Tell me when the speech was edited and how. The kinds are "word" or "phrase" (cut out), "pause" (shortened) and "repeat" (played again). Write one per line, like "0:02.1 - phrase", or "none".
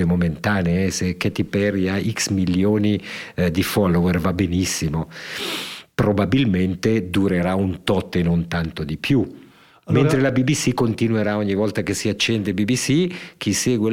none

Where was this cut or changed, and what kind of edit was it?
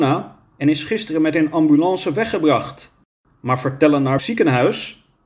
0:04.2 - word

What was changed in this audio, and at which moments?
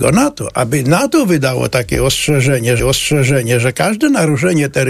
0:02.8 - repeat

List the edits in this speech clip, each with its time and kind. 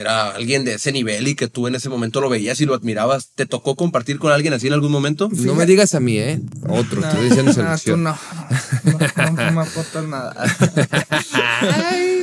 none

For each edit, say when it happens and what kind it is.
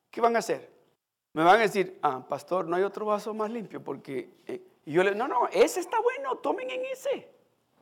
0:00.9 - pause

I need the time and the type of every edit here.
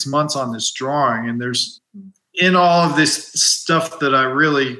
none

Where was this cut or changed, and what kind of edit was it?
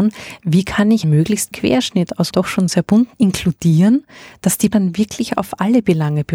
0:01.0 - word
0:01.5 - word
0:02.3 - word
0:03.1 - word
0:04.7 - word

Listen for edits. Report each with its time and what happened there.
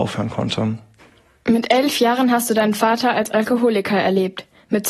none

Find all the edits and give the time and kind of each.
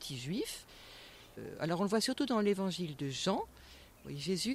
none

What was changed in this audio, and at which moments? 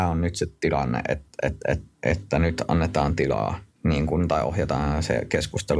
0:01.9 - pause
0:03.7 - pause

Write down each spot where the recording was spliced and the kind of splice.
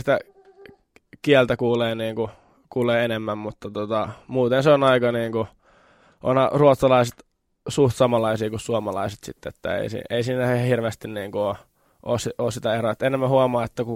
none

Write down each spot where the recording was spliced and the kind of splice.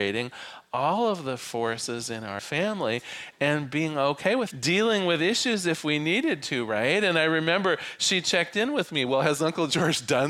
0:02.4 - word
0:04.5 - word

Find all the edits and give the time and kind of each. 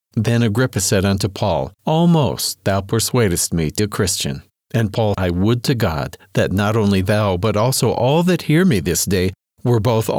0:01.8 - pause
0:03.8 - word
0:04.5 - pause
0:05.1 - word

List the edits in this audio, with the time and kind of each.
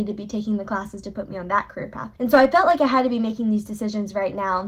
0:02.2 - pause

